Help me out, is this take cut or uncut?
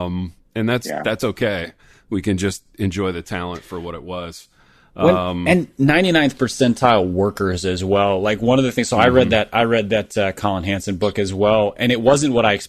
uncut